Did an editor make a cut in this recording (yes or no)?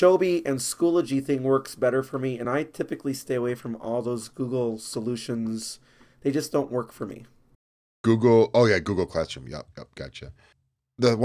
no